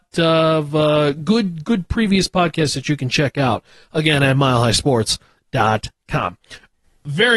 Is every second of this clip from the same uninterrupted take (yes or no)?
yes